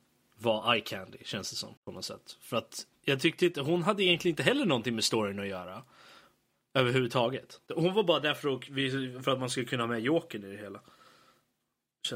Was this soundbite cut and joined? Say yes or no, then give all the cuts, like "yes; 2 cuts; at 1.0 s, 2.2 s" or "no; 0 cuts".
yes; 3 cuts; at 1.8 s, 2.9 s, 7.7 s